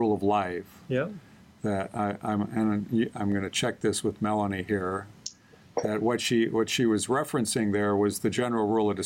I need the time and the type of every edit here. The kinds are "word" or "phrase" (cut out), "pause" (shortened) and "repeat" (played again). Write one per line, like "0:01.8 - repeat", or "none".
none